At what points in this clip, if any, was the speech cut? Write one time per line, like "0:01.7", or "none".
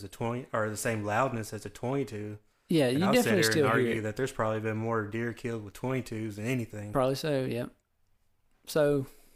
none